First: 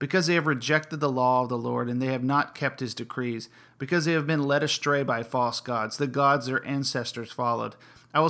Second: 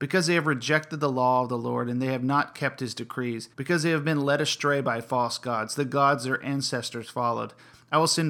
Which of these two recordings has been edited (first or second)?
second